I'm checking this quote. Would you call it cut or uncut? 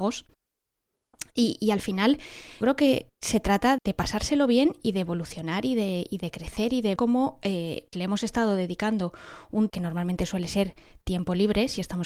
cut